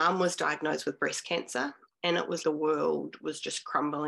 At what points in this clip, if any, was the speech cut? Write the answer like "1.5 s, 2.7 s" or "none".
2.4 s